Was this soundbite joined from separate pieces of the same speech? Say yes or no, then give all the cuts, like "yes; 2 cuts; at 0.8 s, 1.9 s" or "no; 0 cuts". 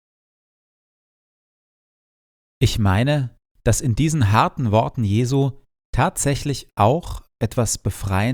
no; 0 cuts